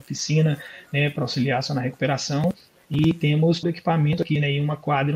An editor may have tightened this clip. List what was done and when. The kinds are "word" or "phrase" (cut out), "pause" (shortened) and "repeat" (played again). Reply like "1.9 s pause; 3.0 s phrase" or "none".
3.6 s word